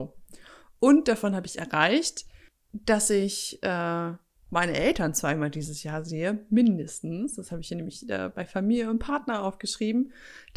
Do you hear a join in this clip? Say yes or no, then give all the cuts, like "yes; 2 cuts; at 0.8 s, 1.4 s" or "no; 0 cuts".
no; 0 cuts